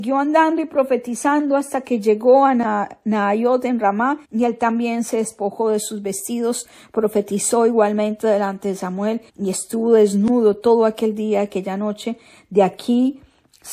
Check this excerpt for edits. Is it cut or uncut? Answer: cut